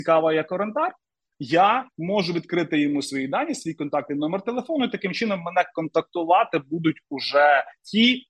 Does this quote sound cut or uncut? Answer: uncut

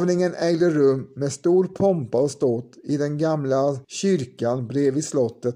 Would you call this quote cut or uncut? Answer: cut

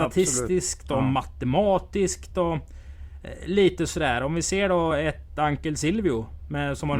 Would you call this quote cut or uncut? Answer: uncut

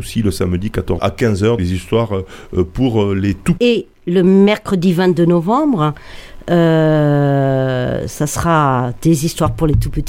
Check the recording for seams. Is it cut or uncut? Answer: cut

